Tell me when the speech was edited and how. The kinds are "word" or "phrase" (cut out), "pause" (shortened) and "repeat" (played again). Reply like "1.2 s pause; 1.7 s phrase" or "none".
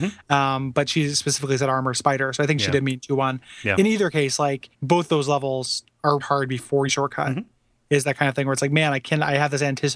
4.7 s pause; 6.2 s word; 6.9 s phrase